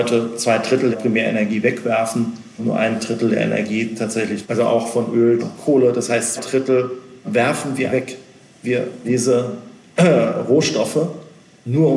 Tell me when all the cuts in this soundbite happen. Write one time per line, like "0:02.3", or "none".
0:00.9
0:02.6
0:04.4
0:05.4
0:06.4
0:07.2
0:07.9
0:09.0